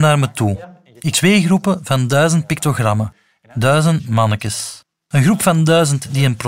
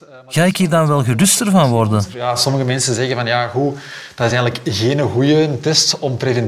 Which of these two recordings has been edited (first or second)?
first